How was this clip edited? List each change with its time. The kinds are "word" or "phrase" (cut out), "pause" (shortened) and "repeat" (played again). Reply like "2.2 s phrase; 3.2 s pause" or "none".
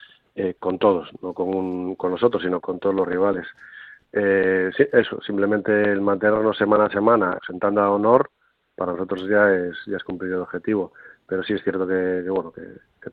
2.6 s word; 7.4 s word